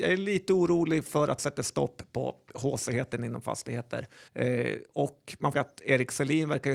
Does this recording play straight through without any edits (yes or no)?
no